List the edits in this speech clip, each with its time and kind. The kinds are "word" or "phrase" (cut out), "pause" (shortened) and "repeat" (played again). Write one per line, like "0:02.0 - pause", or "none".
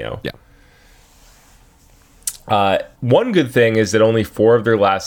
0:02.9 - pause